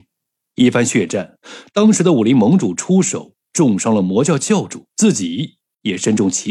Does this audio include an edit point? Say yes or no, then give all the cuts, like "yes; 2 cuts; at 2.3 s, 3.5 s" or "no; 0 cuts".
yes; 1 cut; at 4.9 s